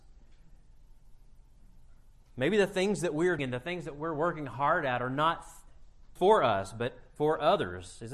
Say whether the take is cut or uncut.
cut